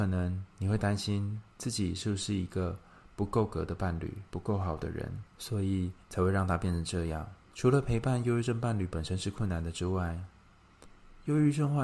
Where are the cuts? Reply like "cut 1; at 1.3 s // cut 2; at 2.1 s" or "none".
cut 1; at 4.3 s // cut 2; at 5.3 s // cut 3; at 6.0 s // cut 4; at 7.4 s